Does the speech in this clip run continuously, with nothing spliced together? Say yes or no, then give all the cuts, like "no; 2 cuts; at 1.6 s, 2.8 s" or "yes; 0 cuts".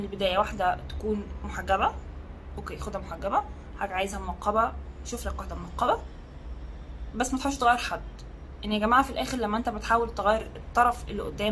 yes; 0 cuts